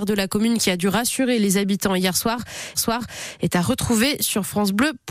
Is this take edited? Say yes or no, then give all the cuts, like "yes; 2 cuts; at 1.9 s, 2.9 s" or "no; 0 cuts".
yes; 1 cut; at 2.7 s